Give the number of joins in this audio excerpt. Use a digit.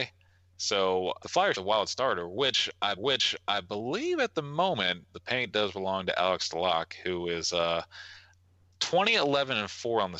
4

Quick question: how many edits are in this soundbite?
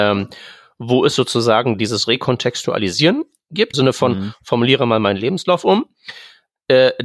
1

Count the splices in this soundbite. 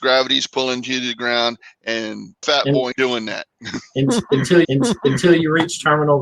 3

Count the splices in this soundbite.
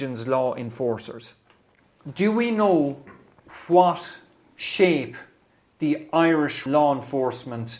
1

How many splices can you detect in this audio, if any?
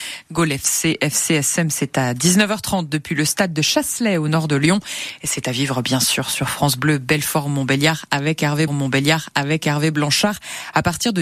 1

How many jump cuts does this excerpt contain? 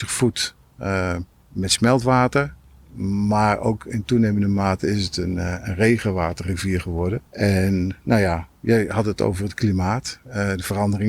0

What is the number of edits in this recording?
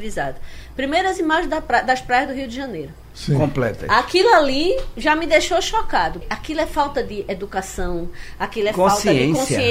1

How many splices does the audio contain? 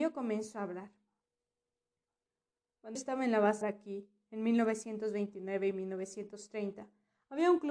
2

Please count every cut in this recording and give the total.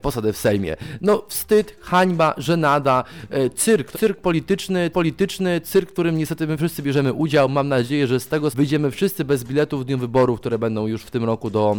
3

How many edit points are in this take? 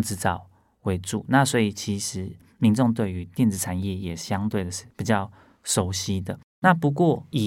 0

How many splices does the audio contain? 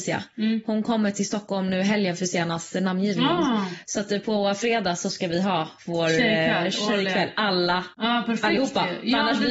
1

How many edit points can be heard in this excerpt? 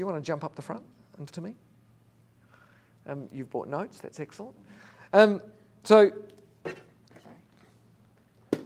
1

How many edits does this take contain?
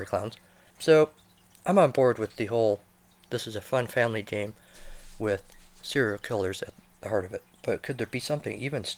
0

